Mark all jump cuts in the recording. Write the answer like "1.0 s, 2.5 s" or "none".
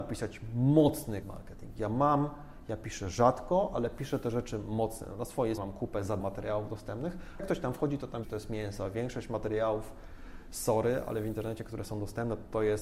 1.2 s, 5.6 s, 6.2 s, 7.4 s, 8.2 s